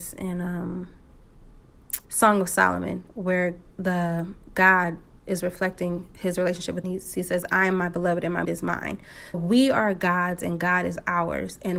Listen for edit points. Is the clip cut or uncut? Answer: cut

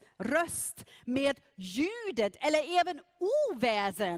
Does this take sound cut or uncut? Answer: uncut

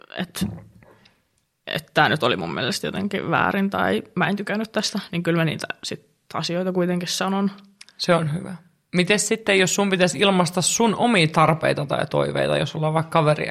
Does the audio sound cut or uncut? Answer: uncut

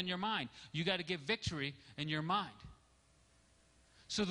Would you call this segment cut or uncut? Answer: uncut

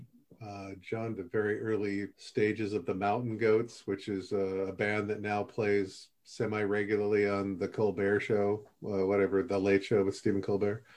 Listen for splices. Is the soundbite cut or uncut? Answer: cut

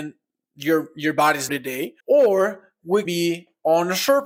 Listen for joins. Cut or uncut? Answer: cut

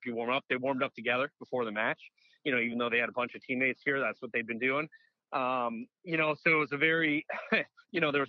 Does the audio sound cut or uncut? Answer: uncut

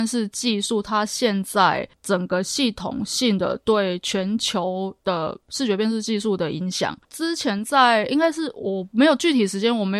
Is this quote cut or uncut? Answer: cut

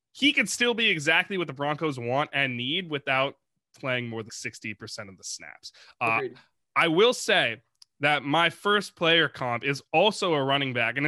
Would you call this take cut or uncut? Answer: cut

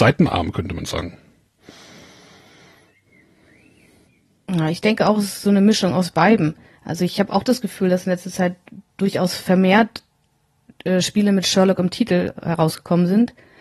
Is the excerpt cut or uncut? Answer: uncut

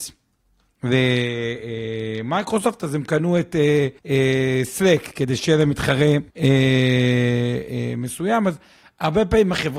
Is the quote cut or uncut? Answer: cut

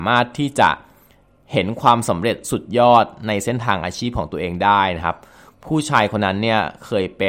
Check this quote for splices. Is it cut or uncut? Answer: uncut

